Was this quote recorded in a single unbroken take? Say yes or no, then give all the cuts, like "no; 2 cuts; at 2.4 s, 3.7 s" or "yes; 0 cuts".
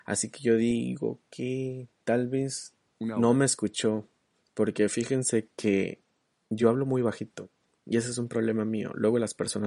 yes; 0 cuts